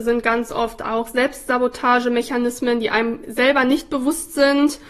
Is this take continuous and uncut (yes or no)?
yes